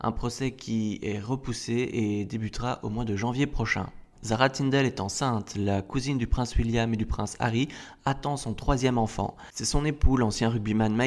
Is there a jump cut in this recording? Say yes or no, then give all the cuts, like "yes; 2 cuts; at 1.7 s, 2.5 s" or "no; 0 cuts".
yes; 1 cut; at 4.1 s